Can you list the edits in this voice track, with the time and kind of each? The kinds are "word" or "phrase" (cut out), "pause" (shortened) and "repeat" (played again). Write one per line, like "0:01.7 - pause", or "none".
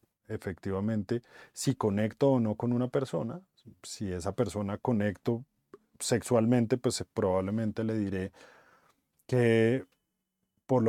none